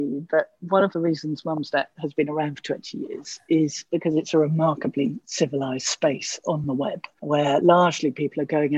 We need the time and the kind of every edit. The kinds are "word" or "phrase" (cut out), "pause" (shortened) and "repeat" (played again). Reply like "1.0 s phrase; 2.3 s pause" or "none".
none